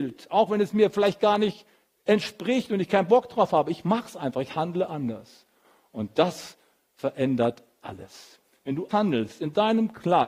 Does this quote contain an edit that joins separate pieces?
yes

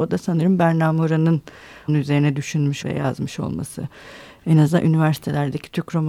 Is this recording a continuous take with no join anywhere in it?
no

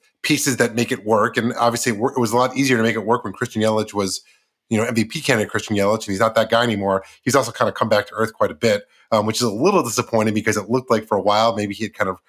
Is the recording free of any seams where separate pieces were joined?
yes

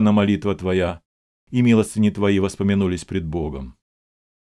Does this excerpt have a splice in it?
no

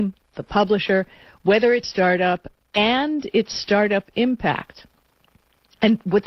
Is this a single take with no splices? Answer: no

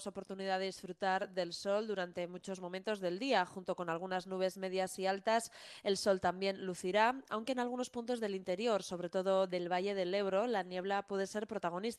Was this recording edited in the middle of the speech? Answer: no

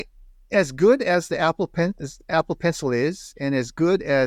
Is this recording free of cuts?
yes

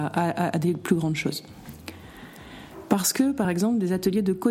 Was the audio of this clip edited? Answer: no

